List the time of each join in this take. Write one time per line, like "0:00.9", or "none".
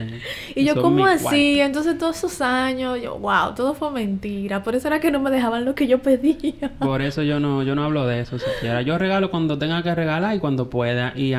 none

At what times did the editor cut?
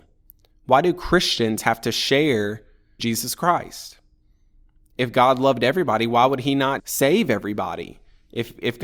0:03.0
0:06.8

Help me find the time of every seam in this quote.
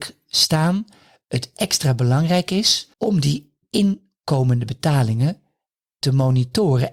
0:02.9

